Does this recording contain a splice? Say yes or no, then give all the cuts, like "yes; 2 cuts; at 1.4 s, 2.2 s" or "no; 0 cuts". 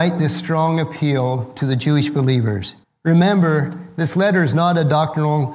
yes; 1 cut; at 2.8 s